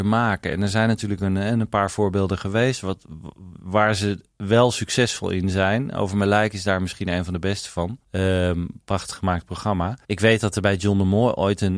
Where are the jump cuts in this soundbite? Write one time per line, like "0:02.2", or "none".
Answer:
0:08.0
0:10.0